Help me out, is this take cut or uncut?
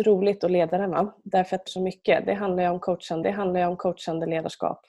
cut